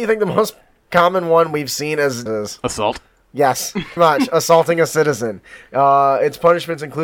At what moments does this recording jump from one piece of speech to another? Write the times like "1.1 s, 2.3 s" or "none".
2.3 s, 4.0 s